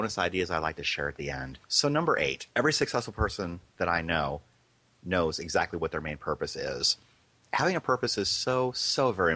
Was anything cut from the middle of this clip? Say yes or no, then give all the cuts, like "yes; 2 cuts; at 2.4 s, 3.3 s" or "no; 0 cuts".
yes; 2 cuts; at 1.6 s, 2.5 s